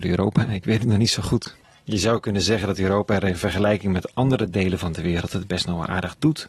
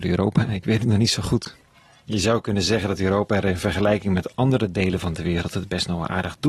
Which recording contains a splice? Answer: first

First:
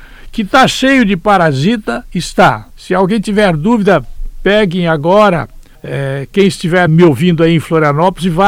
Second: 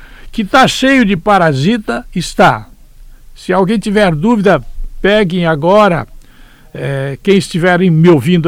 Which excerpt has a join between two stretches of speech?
first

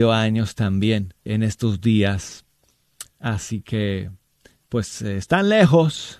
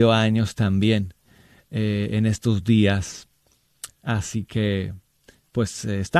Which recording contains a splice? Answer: first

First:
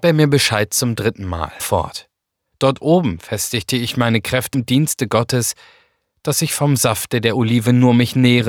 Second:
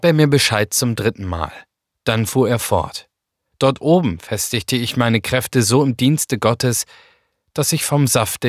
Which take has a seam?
first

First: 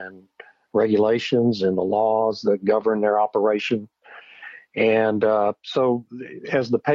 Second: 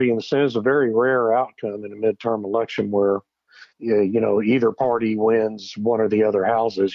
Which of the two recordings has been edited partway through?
second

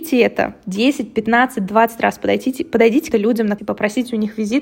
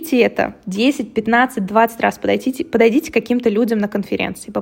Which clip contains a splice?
first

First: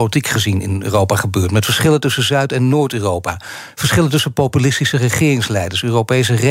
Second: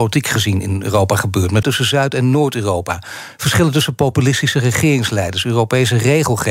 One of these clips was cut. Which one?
second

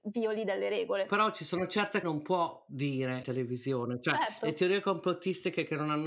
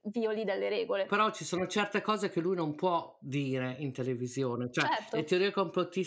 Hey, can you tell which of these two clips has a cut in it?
first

